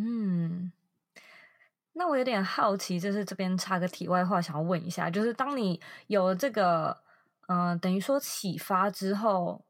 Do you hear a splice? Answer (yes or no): no